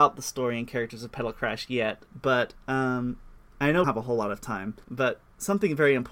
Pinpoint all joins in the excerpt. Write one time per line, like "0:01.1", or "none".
0:02.1
0:03.8
0:04.8